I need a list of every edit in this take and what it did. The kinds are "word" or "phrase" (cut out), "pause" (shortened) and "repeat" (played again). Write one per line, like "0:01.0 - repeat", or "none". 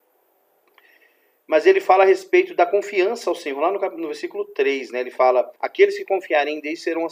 0:05.6 - pause

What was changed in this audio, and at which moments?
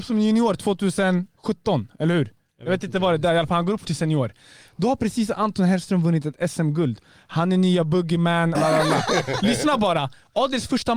0:03.8 - word
0:08.5 - word

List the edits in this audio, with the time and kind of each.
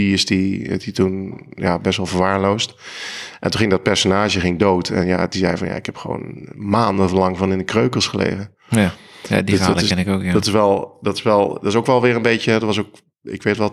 none

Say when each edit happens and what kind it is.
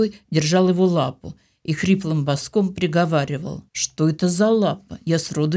0:03.7 - pause

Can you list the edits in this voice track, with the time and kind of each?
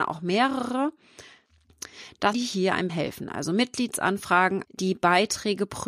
0:02.3 - word
0:02.9 - word
0:04.6 - word

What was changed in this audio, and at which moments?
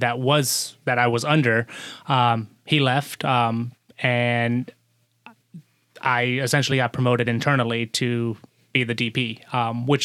none

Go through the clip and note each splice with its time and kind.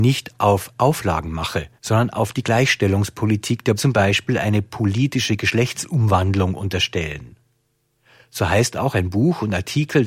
0:01.8 - pause
0:03.8 - phrase

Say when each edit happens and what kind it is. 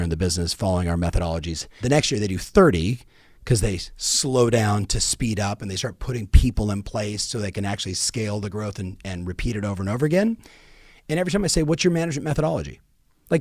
0:01.8 - phrase

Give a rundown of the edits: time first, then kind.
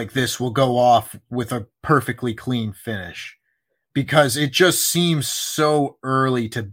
none

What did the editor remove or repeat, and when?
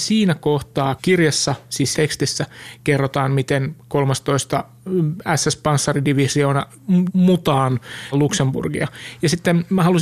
0:01.0 - word
0:01.9 - word
0:07.1 - word
0:08.1 - word

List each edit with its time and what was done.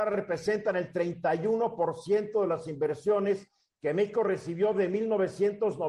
none

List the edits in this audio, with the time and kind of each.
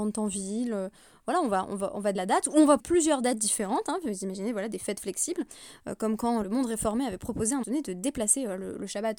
0:02.1 - word
0:02.8 - word
0:06.4 - word
0:07.6 - word

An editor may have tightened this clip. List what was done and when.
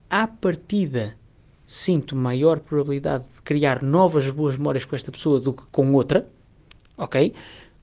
none

